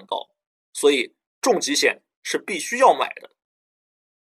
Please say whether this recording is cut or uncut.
uncut